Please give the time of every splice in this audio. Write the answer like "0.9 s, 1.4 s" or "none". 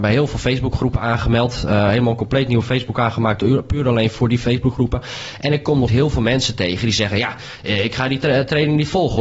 5.9 s